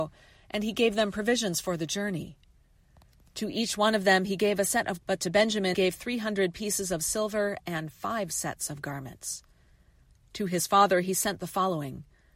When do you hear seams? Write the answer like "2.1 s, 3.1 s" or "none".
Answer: 5.0 s, 5.7 s